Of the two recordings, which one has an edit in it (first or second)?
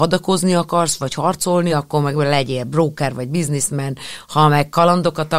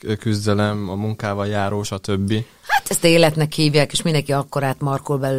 second